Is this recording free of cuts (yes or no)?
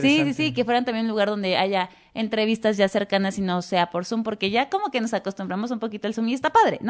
yes